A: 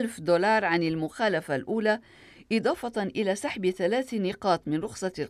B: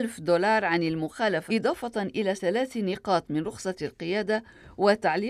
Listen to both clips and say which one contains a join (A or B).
B